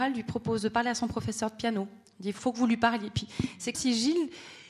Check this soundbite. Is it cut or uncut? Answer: cut